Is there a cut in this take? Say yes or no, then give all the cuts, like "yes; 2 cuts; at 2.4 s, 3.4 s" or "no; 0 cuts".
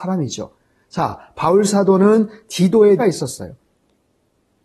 yes; 1 cut; at 3.0 s